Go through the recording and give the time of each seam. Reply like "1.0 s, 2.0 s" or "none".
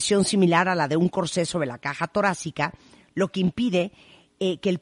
none